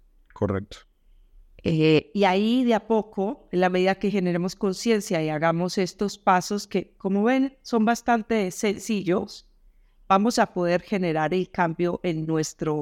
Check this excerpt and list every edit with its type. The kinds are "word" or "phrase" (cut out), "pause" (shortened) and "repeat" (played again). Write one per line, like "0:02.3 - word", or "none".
none